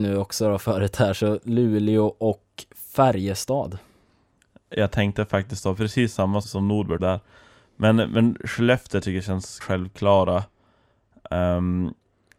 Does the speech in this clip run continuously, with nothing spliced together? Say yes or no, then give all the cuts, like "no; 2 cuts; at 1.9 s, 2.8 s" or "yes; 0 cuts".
no; 3 cuts; at 6.4 s, 7.0 s, 9.6 s